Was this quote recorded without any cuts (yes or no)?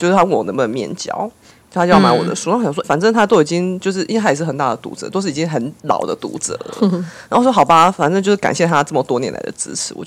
no